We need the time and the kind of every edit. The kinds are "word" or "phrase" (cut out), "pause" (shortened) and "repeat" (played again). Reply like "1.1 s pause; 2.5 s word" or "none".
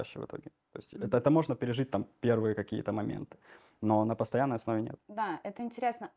none